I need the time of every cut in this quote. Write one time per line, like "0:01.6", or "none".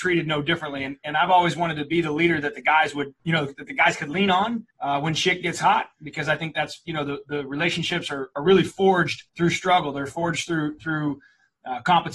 0:03.2
0:04.7
0:09.3